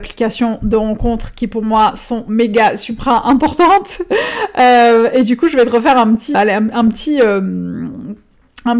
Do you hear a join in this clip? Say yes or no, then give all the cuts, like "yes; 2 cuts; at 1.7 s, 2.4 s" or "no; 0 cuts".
yes; 1 cut; at 6.3 s